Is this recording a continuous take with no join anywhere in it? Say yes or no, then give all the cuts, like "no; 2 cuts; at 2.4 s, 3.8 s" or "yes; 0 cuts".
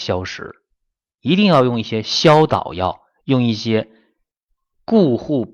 yes; 0 cuts